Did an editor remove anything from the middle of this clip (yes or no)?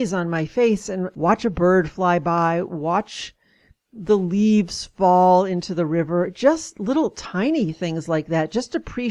no